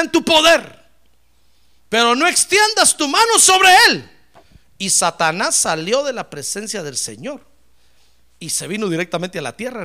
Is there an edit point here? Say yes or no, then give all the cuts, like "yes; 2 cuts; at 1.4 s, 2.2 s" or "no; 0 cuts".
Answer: no; 0 cuts